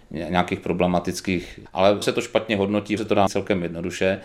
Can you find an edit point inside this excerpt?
yes; 4 cuts; at 1.7 s, 2.0 s, 3.0 s, 3.3 s

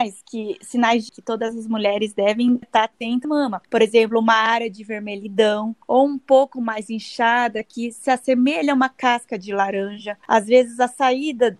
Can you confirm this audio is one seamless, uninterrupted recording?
no; 6 cuts; at 1.1 s, 2.6 s, 3.2 s, 3.6 s, 5.8 s, 10.2 s

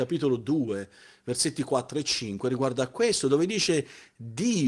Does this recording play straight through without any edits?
yes; 0 cuts

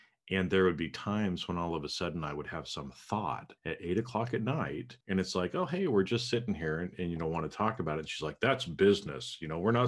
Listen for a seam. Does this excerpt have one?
yes; 2 cuts; at 3.6 s, 5.0 s

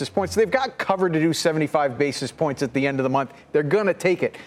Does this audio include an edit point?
no; 0 cuts

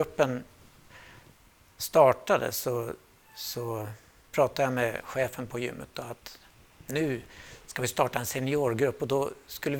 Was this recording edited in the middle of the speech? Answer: no; 0 cuts

